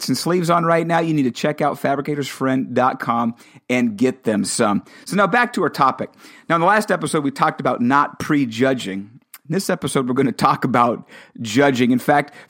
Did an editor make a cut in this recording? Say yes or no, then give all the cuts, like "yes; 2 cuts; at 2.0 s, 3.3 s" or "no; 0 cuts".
no; 0 cuts